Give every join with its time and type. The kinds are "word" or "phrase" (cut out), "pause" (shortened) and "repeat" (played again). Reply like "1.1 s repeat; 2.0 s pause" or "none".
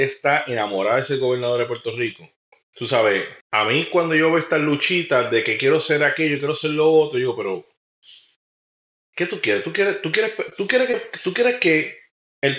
2.5 s pause; 3.4 s pause